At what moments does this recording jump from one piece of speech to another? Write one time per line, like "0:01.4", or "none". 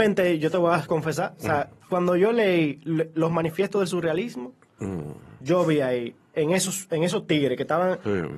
none